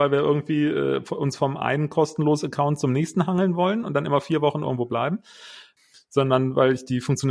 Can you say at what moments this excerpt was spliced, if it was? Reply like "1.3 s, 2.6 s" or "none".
none